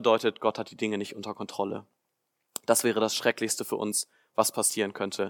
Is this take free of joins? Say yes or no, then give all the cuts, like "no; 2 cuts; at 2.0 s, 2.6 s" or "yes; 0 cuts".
yes; 0 cuts